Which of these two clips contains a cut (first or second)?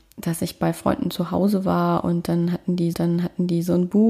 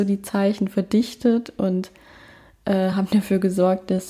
first